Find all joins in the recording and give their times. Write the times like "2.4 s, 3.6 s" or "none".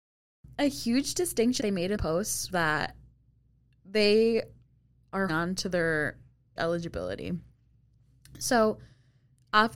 1.6 s, 2.0 s, 2.5 s, 5.3 s, 6.6 s